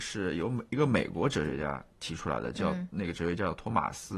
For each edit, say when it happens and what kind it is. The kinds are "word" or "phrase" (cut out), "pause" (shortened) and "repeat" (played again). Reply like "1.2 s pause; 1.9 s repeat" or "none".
1.9 s pause